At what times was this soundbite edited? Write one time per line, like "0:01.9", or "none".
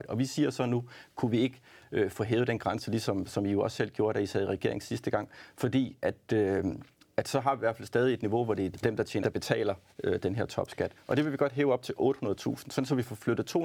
0:08.7
0:09.2